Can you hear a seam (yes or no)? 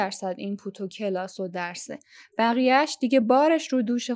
no